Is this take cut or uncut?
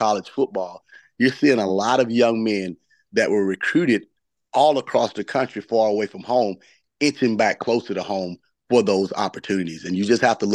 uncut